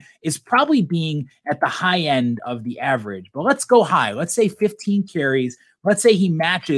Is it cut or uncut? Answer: uncut